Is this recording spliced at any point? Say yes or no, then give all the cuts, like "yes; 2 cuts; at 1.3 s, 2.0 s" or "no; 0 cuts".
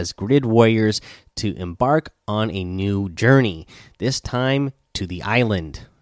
no; 0 cuts